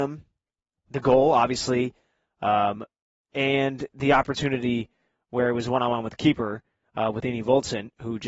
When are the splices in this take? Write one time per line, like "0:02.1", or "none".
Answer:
none